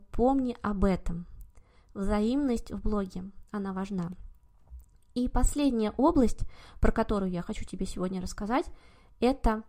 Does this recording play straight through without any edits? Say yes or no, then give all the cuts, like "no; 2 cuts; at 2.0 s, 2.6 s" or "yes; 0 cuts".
yes; 0 cuts